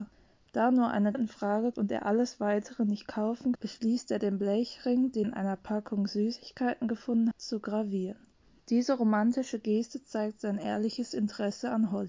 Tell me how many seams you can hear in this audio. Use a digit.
5